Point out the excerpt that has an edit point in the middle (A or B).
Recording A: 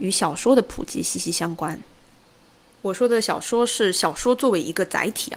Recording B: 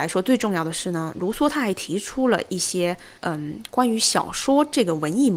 B